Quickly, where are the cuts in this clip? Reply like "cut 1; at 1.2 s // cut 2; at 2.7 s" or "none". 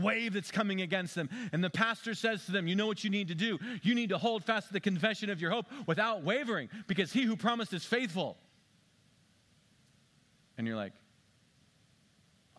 none